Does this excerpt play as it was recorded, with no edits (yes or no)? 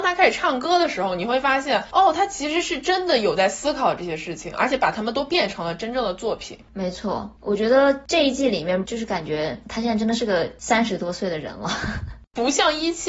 no